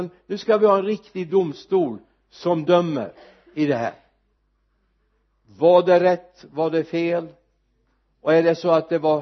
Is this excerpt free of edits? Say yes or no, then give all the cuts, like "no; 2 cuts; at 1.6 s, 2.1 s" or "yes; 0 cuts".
yes; 0 cuts